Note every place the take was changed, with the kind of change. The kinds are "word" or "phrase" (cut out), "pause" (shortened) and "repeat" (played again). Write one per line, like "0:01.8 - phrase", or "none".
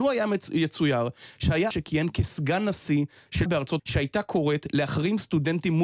0:01.7 - word
0:03.5 - word
0:03.8 - word

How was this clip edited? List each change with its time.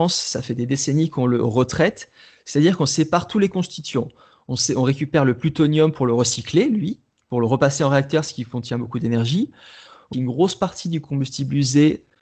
0:10.1 - phrase

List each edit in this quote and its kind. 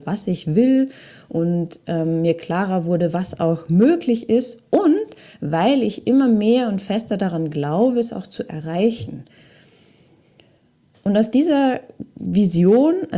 none

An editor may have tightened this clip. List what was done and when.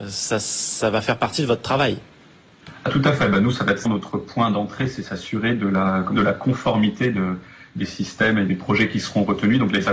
0:03.9 - word
0:06.2 - phrase
0:08.5 - word

